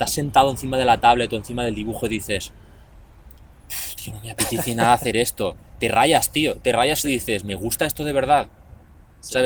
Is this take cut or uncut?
uncut